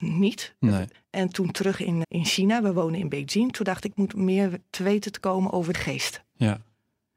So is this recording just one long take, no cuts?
no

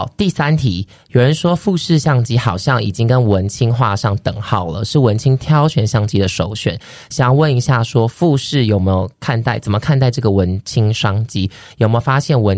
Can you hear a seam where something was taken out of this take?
no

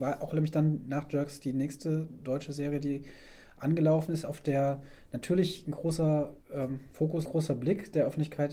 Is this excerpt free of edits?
no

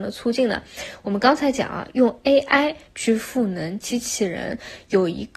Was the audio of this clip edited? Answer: no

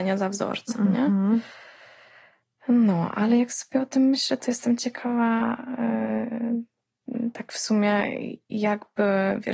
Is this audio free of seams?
yes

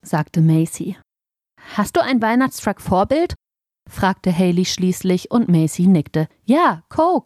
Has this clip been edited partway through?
no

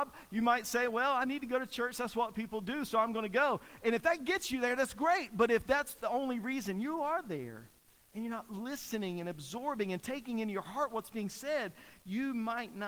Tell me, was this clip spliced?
no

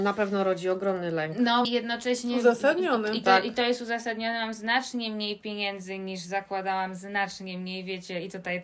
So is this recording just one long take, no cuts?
no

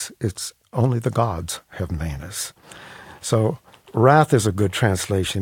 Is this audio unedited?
yes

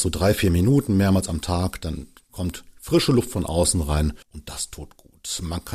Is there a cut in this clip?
yes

